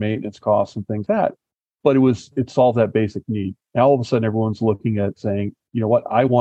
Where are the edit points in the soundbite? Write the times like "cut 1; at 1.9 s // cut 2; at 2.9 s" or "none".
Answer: cut 1; at 1.1 s